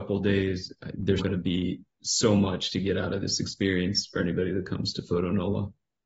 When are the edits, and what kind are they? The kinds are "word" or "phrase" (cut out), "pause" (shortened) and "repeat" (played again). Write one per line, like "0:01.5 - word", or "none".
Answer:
0:01.2 - word